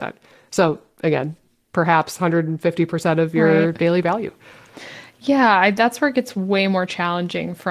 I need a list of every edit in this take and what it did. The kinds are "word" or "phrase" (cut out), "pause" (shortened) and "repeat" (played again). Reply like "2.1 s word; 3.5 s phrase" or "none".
none